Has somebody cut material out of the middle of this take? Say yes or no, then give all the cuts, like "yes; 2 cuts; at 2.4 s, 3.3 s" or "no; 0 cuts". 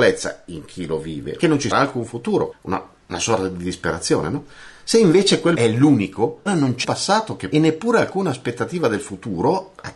yes; 7 cuts; at 1.4 s, 1.7 s, 2.5 s, 5.5 s, 6.5 s, 6.8 s, 7.5 s